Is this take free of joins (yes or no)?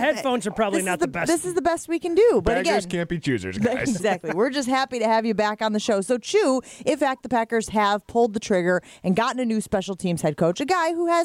no